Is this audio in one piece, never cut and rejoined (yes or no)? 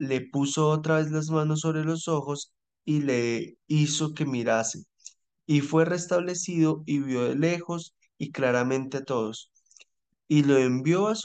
yes